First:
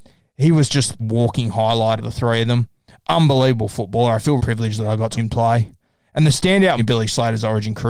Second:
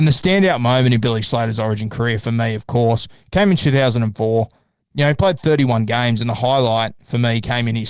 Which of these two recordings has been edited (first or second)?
first